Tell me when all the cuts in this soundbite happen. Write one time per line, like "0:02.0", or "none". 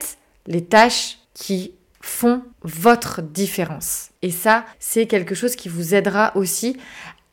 0:01.2
0:02.5
0:04.2
0:04.7

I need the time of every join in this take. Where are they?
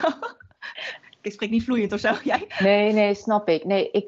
none

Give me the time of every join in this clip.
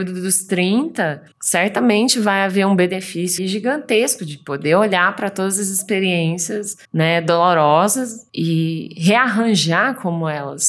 0:01.3
0:03.4
0:06.8
0:08.3

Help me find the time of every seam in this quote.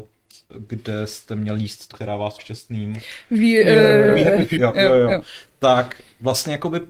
0:01.9
0:02.4
0:04.6

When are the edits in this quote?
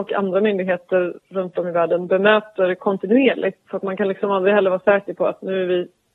none

